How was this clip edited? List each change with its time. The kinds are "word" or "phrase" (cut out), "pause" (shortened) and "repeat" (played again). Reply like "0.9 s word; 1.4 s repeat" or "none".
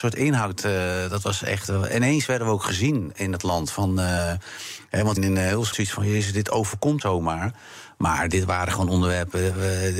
5.2 s word; 5.7 s word; 7.0 s word